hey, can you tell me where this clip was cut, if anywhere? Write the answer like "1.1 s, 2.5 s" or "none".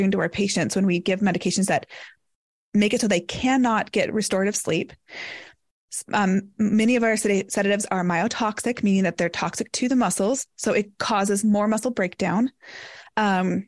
none